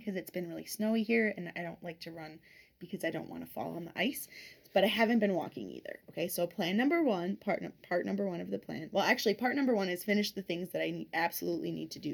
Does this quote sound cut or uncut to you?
uncut